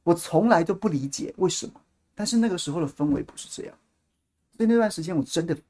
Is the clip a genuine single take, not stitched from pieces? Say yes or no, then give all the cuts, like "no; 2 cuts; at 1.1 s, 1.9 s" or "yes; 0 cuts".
yes; 0 cuts